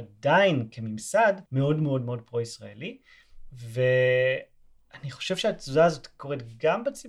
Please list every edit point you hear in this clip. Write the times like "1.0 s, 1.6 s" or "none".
1.5 s